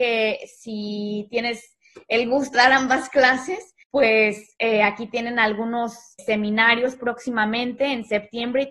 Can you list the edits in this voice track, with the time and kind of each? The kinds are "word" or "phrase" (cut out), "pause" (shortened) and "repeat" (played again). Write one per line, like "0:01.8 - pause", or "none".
0:02.5 - word
0:03.8 - pause
0:06.2 - word